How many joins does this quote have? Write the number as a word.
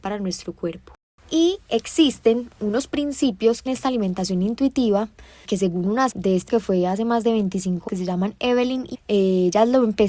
six